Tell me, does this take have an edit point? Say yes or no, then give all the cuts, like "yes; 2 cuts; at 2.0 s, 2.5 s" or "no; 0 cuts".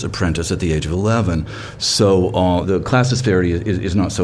yes; 1 cut; at 2.6 s